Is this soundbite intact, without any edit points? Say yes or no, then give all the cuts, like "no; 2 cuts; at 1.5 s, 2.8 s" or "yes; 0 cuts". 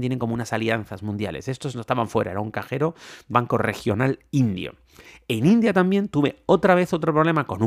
no; 1 cut; at 3.3 s